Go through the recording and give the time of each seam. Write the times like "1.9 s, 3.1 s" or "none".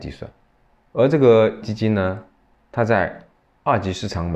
1.6 s